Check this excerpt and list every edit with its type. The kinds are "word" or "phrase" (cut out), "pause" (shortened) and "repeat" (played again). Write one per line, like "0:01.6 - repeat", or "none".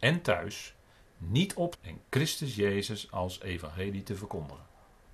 0:01.7 - phrase